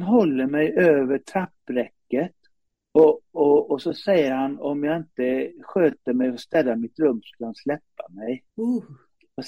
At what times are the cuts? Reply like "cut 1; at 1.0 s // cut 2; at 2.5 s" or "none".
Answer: cut 1; at 2.7 s // cut 2; at 8.5 s

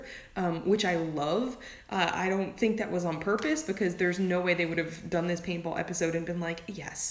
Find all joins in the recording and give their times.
none

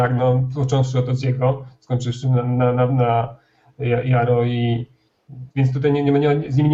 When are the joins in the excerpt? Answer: cut 1; at 5.5 s

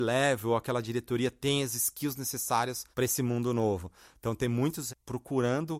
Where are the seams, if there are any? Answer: cut 1; at 2.9 s // cut 2; at 4.9 s

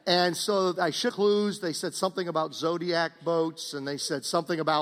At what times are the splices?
cut 1; at 1.1 s

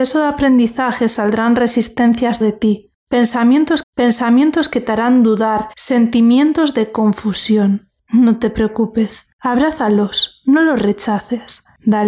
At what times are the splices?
cut 1; at 2.4 s // cut 2; at 3.8 s // cut 3; at 5.7 s

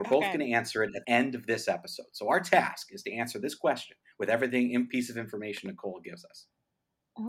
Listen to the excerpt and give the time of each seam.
cut 1; at 1.0 s

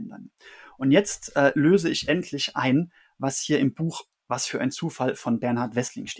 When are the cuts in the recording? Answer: none

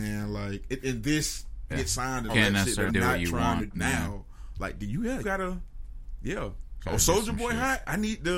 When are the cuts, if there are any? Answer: cut 1; at 1.7 s // cut 2; at 2.3 s // cut 3; at 2.9 s // cut 4; at 3.7 s // cut 5; at 5.2 s

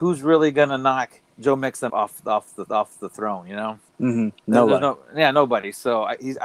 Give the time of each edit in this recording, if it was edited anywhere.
cut 1; at 1.3 s // cut 2; at 1.9 s // cut 3; at 2.7 s // cut 4; at 3.9 s

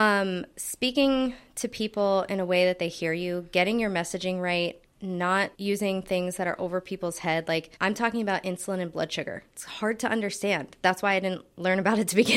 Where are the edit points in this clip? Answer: cut 1; at 5.5 s // cut 2; at 7.8 s

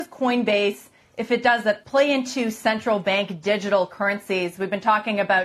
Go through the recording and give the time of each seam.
cut 1; at 1.8 s

